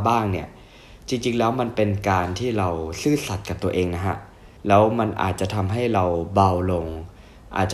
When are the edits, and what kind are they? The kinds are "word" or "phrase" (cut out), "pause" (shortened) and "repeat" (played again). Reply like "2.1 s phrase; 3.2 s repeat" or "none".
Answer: 4.6 s pause